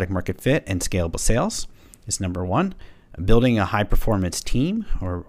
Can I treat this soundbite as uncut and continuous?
yes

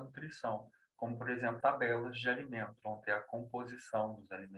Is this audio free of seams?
no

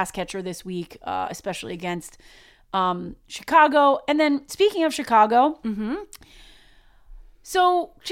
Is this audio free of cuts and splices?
yes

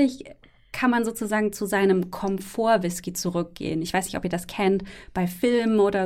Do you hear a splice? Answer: no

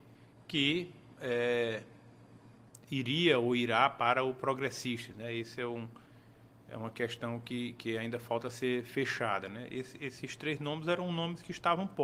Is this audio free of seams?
yes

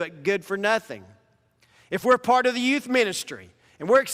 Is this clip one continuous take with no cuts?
yes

